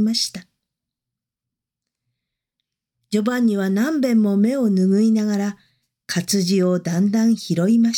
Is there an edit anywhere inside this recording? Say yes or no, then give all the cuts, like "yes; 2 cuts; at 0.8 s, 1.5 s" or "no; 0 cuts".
no; 0 cuts